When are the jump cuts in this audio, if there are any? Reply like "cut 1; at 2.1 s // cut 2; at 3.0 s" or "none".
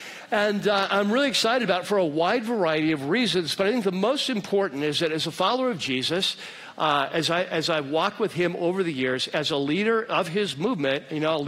none